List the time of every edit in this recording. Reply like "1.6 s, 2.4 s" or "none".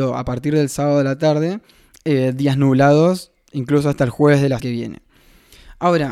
4.6 s

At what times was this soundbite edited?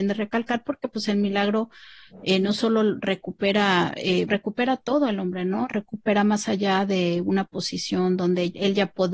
4.3 s

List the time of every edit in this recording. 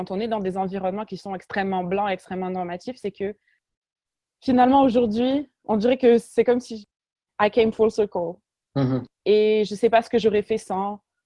none

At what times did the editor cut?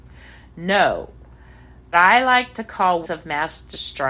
1.9 s, 3.0 s

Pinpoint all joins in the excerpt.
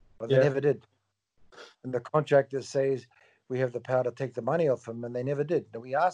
none

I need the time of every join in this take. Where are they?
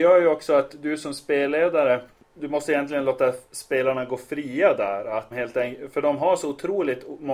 5.3 s

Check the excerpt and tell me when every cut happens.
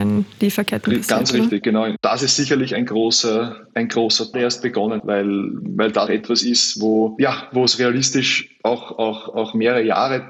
4.3 s, 5.0 s, 6.1 s

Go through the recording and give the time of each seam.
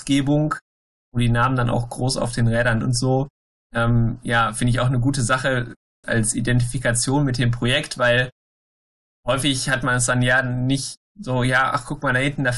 2.8 s, 6.0 s

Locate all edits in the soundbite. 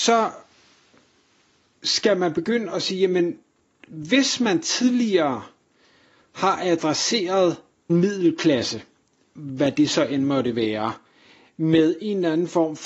7.9 s

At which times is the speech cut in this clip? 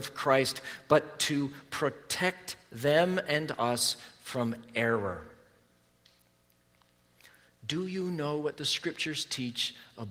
none

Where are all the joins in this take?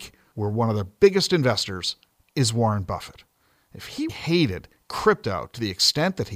4.1 s

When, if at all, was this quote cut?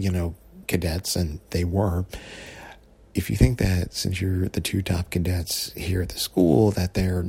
none

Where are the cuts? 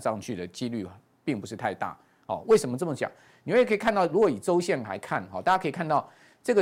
none

